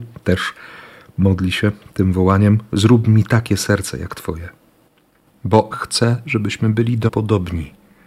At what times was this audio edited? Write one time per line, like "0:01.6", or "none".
0:02.7
0:05.7
0:07.1